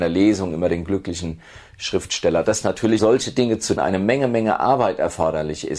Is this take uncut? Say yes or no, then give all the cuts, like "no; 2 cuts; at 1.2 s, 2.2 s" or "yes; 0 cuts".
no; 2 cuts; at 3.0 s, 3.8 s